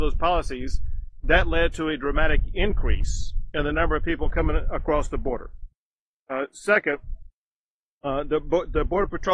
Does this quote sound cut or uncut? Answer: uncut